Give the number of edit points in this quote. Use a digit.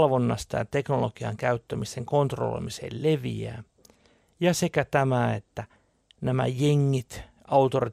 0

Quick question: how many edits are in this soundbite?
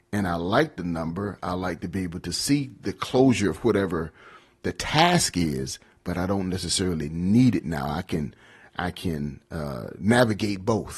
0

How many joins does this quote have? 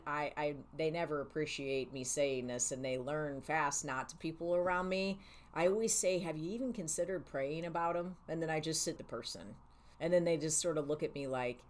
4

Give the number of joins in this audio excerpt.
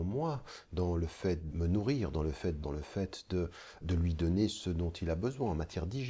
3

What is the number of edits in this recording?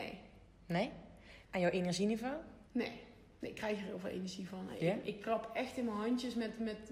2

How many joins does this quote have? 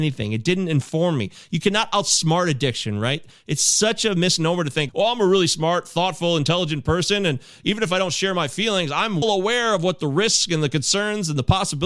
2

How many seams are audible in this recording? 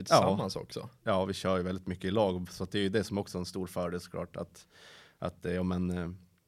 0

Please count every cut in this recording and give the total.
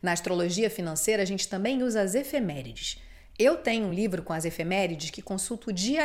0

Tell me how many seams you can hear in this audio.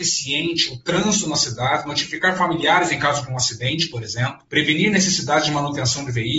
0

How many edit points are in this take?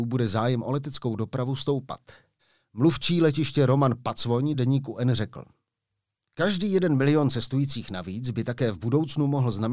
0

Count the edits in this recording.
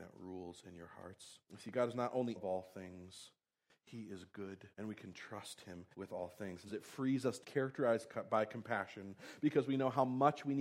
6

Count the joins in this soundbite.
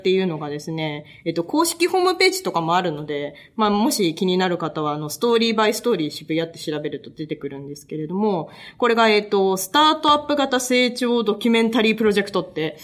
0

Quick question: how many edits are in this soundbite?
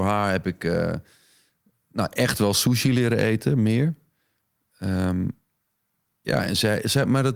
0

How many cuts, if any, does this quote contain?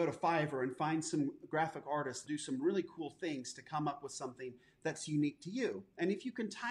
1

